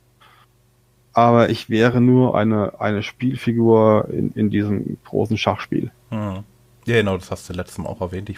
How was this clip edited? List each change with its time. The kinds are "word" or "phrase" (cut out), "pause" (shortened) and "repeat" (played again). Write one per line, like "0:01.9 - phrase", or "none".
none